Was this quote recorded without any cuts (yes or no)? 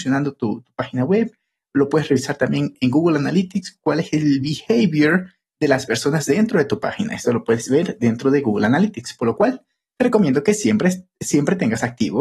yes